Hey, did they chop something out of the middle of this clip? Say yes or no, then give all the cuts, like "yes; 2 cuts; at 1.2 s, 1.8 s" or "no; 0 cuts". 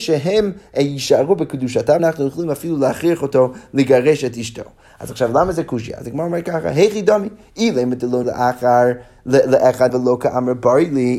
yes; 3 cuts; at 2.0 s, 8.2 s, 9.9 s